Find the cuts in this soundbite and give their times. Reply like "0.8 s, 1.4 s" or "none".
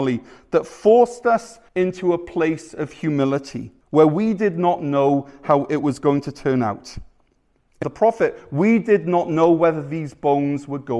1.7 s, 3.8 s, 7.8 s